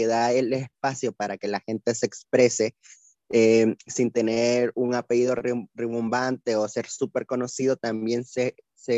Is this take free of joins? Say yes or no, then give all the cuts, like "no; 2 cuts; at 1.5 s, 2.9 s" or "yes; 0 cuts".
yes; 0 cuts